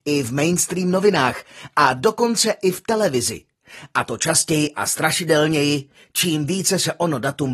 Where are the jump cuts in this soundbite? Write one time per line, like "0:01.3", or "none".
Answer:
none

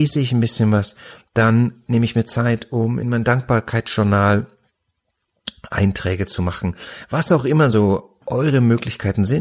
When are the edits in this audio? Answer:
none

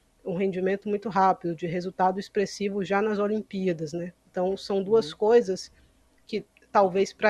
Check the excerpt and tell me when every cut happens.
0:04.2

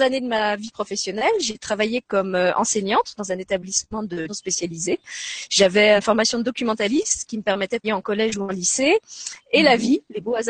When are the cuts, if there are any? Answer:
0:04.3
0:06.0
0:07.8

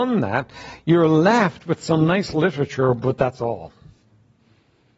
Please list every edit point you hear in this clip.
none

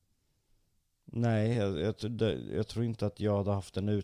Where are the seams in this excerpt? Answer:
none

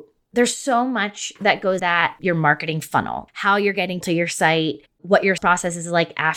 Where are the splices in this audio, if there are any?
0:01.8
0:02.2
0:03.3
0:04.0
0:05.4

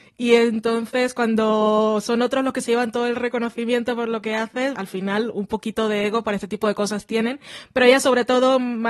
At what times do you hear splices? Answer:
0:04.7

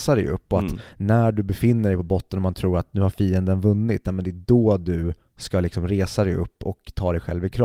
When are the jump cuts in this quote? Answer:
none

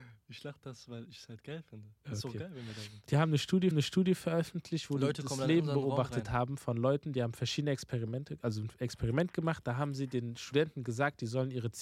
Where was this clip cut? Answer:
0:03.1
0:03.7

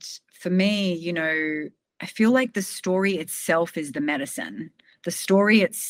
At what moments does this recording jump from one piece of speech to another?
none

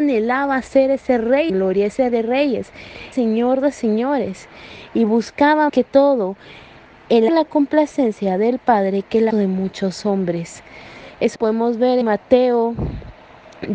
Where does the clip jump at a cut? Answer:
0:01.5
0:02.1
0:03.1
0:05.7
0:07.3
0:09.3
0:11.3
0:12.0

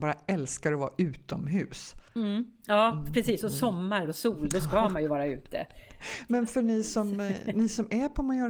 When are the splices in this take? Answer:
0:02.1

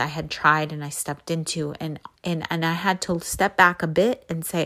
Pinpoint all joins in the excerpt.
0:02.2

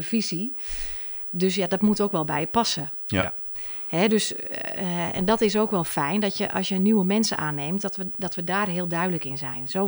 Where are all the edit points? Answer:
none

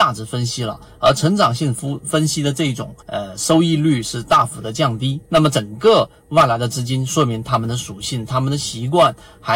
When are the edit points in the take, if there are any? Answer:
0:03.0
0:05.2

